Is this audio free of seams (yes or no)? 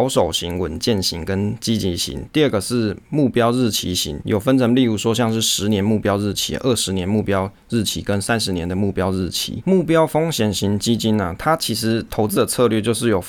yes